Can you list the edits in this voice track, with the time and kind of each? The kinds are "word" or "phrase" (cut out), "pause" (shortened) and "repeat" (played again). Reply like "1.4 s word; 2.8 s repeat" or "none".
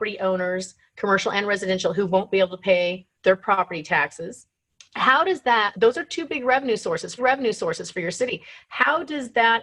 3.1 s pause; 4.7 s pause; 5.7 s word; 7.2 s repeat

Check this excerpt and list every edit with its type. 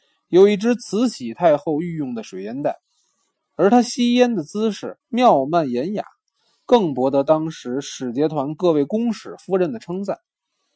5.0 s pause

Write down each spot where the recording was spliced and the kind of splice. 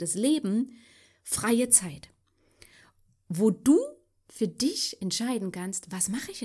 none

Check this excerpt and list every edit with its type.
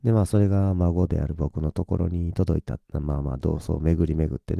2.8 s pause

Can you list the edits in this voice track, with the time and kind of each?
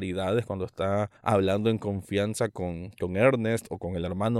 1.2 s pause

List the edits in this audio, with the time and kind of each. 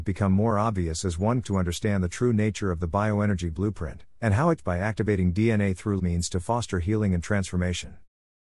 1.4 s word; 4.6 s phrase; 6.0 s word

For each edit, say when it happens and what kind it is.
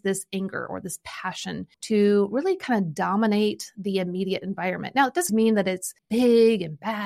1.7 s pause; 5.3 s word; 6.0 s pause

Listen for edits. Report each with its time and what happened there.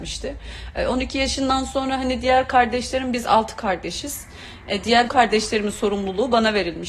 5.1 s word

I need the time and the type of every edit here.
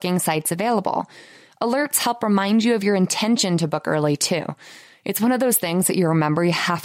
none

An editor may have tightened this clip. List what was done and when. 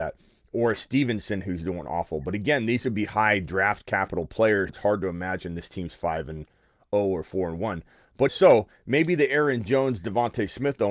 4.7 s word; 8.3 s word

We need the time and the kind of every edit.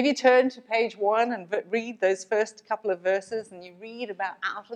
none

